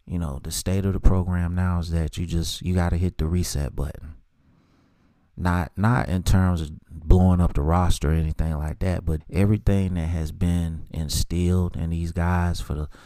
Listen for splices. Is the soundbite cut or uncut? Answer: cut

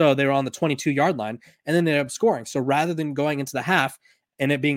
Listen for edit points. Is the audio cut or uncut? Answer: uncut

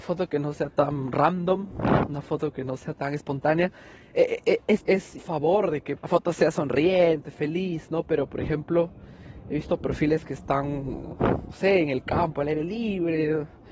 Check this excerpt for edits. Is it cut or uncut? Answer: cut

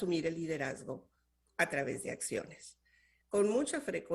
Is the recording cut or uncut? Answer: uncut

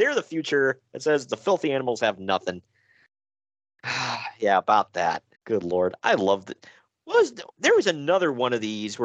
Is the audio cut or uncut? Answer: cut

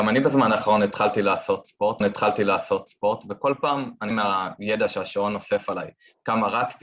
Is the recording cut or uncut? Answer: cut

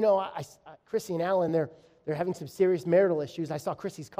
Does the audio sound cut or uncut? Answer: uncut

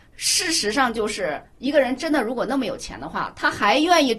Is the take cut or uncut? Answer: cut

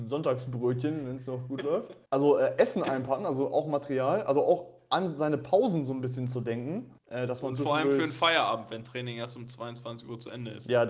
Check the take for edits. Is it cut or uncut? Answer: cut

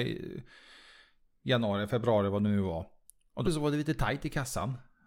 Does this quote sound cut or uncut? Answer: cut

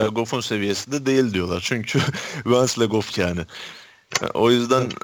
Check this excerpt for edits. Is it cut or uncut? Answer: cut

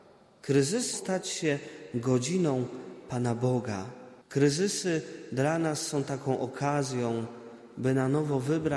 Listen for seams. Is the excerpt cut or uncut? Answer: cut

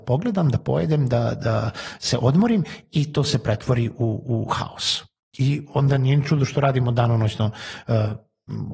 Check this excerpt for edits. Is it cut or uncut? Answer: uncut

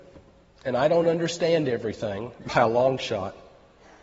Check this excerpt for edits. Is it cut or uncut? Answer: uncut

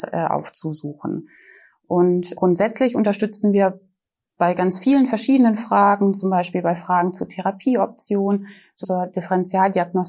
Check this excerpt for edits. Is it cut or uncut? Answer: cut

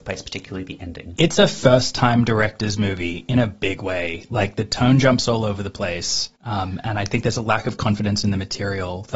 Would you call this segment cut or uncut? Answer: cut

